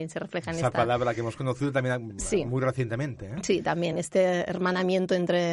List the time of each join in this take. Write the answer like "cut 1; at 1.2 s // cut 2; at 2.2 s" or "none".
none

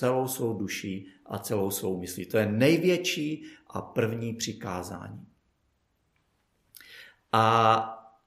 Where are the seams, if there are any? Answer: none

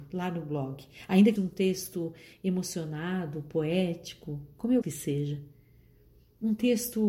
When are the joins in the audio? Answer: cut 1; at 1.4 s // cut 2; at 4.8 s

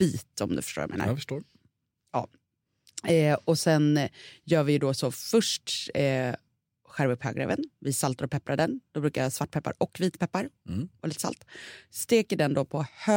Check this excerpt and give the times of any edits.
none

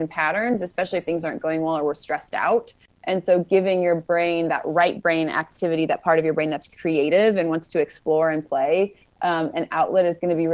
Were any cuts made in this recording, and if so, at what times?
none

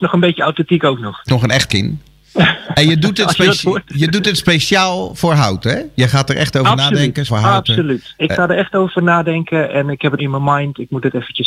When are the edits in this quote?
cut 1; at 1.3 s // cut 2; at 1.7 s // cut 3; at 7.3 s // cut 4; at 10.2 s

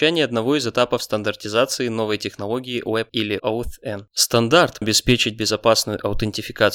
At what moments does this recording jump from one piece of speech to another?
cut 1; at 3.1 s // cut 2; at 3.4 s // cut 3; at 4.8 s

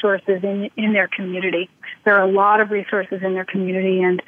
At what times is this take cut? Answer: none

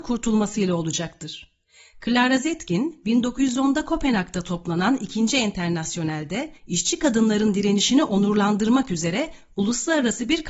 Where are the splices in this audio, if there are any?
cut 1; at 6.6 s

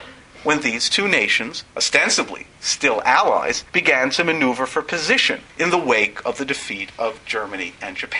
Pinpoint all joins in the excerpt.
cut 1; at 1.7 s // cut 2; at 3.7 s // cut 3; at 5.5 s

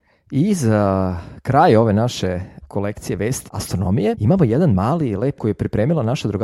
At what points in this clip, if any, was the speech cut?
cut 1; at 2.6 s // cut 2; at 3.5 s // cut 3; at 4.1 s // cut 4; at 5.4 s

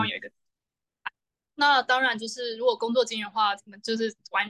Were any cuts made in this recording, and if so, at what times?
none

